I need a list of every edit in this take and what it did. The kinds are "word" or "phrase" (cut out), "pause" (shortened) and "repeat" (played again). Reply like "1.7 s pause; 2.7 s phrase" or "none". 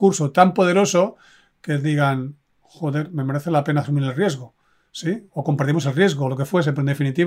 none